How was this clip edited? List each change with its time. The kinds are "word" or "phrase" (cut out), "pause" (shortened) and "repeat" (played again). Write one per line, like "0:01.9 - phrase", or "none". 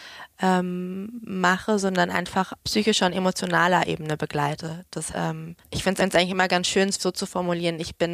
0:02.6 - word
0:05.1 - word
0:05.6 - pause
0:06.0 - repeat
0:07.0 - word